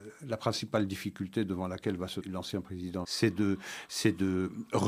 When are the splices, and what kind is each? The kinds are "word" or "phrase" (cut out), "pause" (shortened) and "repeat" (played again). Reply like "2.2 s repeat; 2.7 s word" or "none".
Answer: 2.2 s word; 3.0 s word